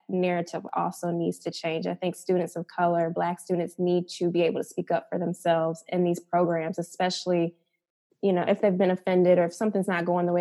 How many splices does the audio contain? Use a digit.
0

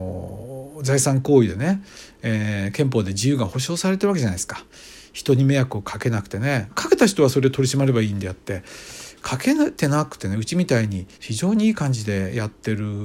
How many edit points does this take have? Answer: 2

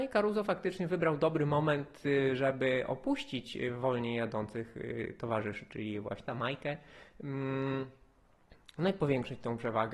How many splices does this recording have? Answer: 1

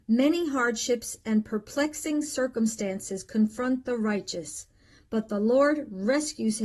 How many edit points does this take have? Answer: 0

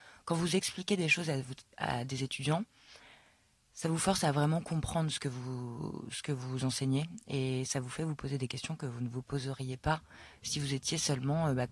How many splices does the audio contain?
0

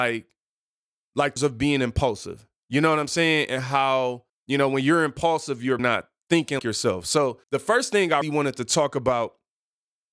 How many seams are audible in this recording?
6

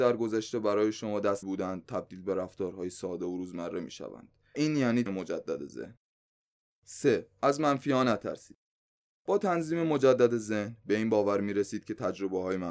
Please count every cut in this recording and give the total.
3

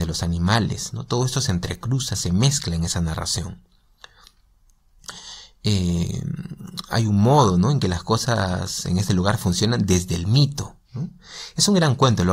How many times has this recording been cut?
1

